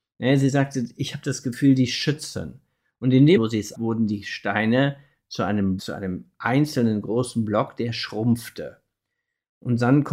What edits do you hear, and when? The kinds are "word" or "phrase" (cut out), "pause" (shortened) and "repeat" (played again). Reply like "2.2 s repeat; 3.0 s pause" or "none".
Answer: 3.4 s word; 3.7 s word; 5.8 s word